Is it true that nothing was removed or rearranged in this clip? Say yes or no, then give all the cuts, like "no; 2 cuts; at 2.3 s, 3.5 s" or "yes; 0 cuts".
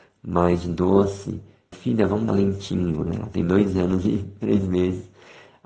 no; 2 cuts; at 1.7 s, 2.3 s